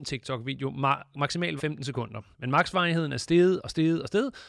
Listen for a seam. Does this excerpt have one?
yes; 2 cuts; at 1.6 s, 2.3 s

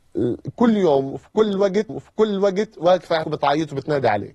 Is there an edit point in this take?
yes; 2 cuts; at 1.9 s, 3.2 s

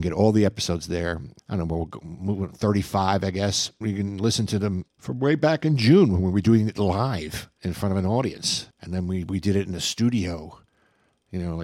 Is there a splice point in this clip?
yes; 2 cuts; at 1.4 s, 8.7 s

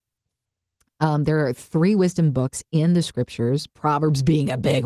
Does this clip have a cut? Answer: no; 0 cuts

